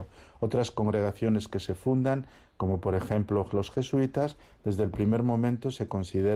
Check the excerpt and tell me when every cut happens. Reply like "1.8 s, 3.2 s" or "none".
none